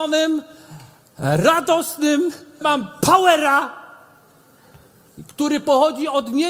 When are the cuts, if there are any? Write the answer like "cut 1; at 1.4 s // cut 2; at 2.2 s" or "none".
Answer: cut 1; at 2.6 s

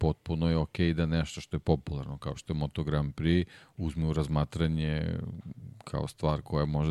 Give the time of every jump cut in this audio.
none

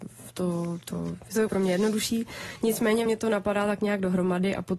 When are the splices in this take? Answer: cut 1; at 1.5 s // cut 2; at 3.1 s

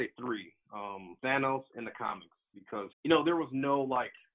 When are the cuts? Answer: cut 1; at 1.2 s // cut 2; at 2.9 s

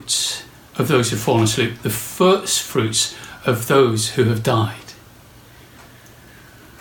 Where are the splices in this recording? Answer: none

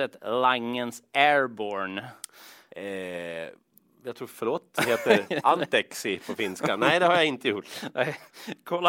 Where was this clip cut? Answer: none

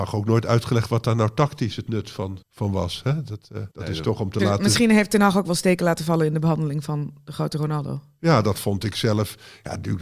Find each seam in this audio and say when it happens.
cut 1; at 2.4 s // cut 2; at 3.7 s

